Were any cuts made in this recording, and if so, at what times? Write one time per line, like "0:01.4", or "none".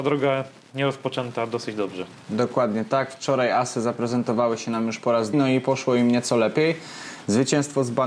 0:05.3